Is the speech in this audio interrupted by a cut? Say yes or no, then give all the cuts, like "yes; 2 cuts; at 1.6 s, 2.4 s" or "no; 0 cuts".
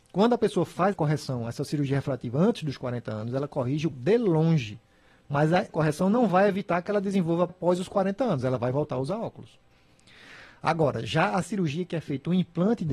yes; 4 cuts; at 0.9 s, 3.9 s, 5.7 s, 7.5 s